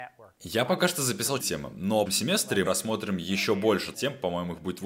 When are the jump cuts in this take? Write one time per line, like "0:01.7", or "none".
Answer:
0:01.4
0:02.1
0:02.6
0:03.9